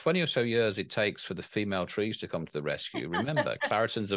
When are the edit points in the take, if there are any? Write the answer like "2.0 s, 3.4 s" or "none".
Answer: none